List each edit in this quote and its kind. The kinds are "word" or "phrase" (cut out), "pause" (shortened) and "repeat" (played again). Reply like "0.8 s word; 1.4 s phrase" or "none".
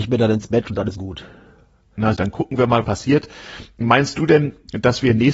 0.9 s word; 2.1 s word; 2.8 s word

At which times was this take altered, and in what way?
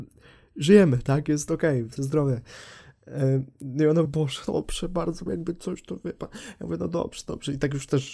2.0 s word; 4.0 s word; 4.5 s word; 5.3 s word

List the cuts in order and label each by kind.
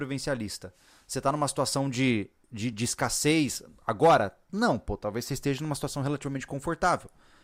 none

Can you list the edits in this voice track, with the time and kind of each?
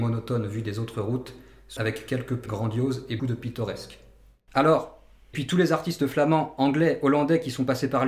1.8 s word; 2.5 s word; 3.2 s word; 5.3 s word

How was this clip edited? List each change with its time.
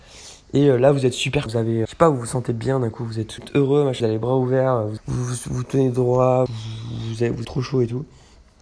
1.5 s word; 1.8 s word; 3.4 s word; 4.0 s word; 5.0 s word; 6.5 s word; 7.4 s word

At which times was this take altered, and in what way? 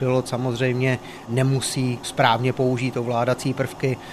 none

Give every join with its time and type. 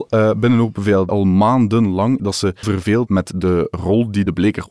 1.1 s word; 2.2 s word; 2.6 s word; 3.1 s word

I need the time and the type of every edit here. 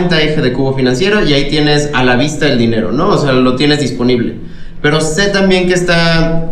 none

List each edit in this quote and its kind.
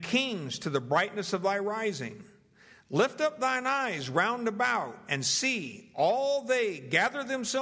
none

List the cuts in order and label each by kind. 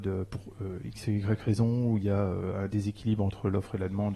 none

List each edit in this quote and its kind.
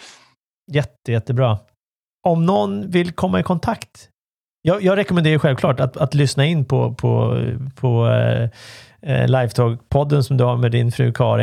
none

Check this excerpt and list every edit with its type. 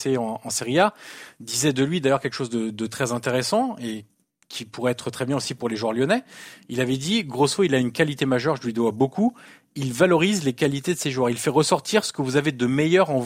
none

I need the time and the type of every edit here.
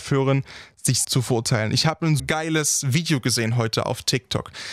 1.0 s word; 2.2 s word

